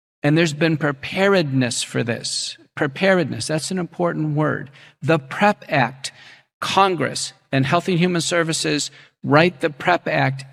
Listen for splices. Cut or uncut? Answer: uncut